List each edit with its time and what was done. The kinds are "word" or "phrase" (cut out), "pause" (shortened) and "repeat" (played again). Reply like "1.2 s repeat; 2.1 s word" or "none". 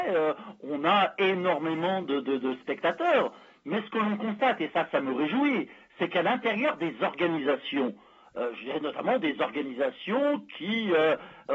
none